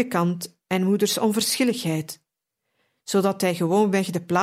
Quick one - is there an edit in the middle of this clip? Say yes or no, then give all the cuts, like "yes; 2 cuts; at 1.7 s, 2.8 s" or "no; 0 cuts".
no; 0 cuts